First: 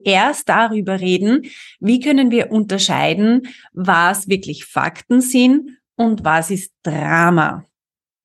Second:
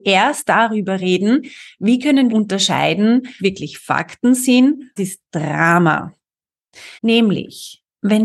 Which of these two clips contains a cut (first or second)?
second